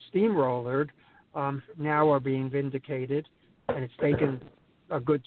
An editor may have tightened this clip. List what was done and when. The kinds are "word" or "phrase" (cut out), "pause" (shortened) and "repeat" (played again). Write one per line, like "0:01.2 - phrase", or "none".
none